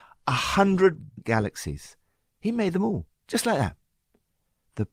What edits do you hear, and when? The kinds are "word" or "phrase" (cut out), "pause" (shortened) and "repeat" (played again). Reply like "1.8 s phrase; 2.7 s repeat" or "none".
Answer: 1.2 s word; 3.1 s pause